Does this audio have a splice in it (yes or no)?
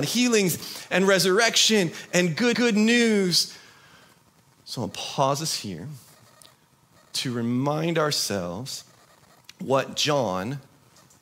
yes